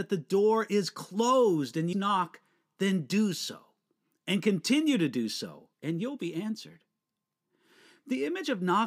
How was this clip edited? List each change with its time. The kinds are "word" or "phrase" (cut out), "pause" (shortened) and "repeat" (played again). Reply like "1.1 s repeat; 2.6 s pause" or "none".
1.9 s word; 5.7 s pause